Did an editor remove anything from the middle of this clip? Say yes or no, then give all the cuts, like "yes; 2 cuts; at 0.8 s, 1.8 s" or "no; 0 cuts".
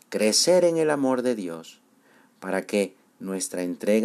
no; 0 cuts